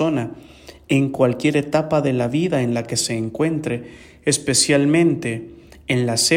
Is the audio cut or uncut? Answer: uncut